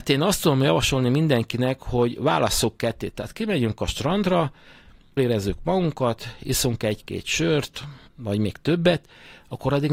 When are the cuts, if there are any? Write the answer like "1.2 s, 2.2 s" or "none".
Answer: 5.2 s, 8.1 s